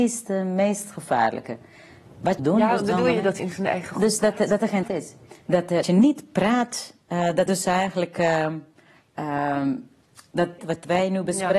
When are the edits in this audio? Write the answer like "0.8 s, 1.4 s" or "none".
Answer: 2.4 s, 2.8 s, 3.4 s, 4.8 s, 5.8 s, 7.5 s, 10.6 s